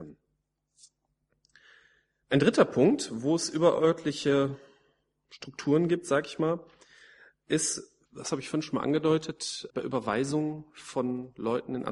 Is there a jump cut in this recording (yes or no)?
yes